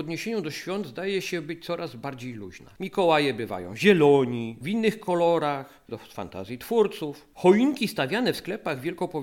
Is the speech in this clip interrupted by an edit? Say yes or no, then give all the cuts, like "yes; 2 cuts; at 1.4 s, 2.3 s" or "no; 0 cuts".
yes; 3 cuts; at 2.8 s, 4.6 s, 5.9 s